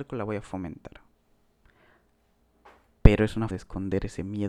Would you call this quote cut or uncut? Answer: cut